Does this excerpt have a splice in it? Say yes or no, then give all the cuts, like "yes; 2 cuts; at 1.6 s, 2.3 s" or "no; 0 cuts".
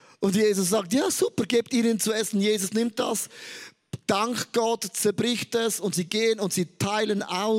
no; 0 cuts